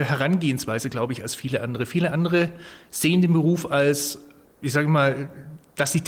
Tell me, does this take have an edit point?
yes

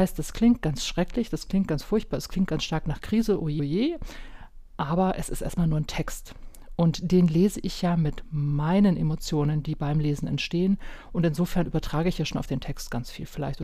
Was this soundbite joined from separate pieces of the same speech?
yes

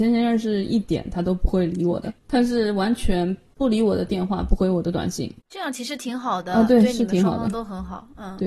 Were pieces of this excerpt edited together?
yes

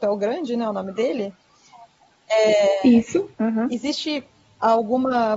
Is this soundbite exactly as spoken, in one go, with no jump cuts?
no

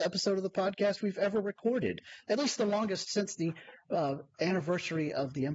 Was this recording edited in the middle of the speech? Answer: no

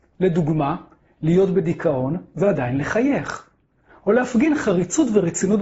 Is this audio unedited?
yes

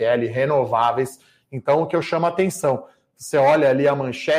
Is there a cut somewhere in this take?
no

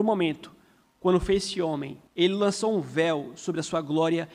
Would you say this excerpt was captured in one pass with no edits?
no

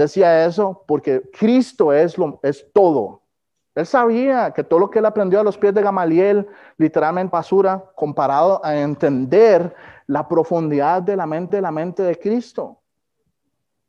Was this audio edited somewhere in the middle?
yes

